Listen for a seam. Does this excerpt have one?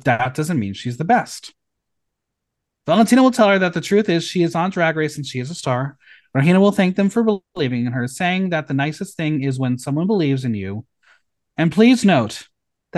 no; 0 cuts

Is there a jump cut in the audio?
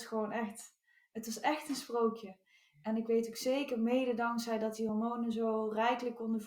no; 0 cuts

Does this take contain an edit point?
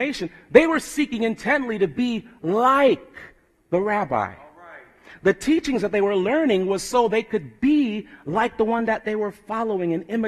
no; 0 cuts

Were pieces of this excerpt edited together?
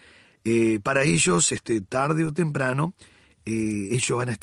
no; 0 cuts

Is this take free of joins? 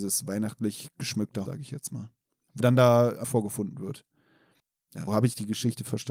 no; 4 cuts; at 1.5 s, 2.6 s, 3.2 s, 5.1 s

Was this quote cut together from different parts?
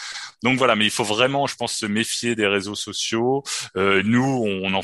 no; 0 cuts

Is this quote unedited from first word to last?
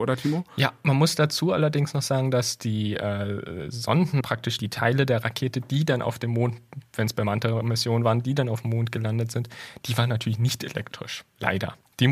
no; 2 cuts; at 4.2 s, 4.6 s

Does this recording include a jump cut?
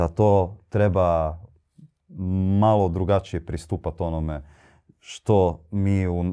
no; 0 cuts

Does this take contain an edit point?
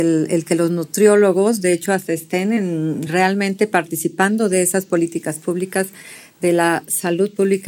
no; 0 cuts

